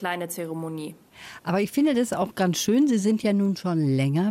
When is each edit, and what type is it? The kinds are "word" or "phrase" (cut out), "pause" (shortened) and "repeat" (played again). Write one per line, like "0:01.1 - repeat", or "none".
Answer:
none